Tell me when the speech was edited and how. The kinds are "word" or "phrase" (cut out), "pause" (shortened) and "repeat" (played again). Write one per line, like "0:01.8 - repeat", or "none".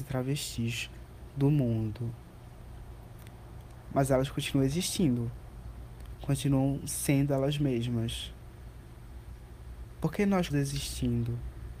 0:10.5 - word